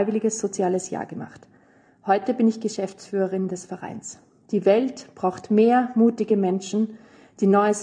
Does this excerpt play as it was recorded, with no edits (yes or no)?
yes